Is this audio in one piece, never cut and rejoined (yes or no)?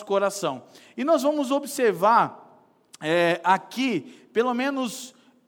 yes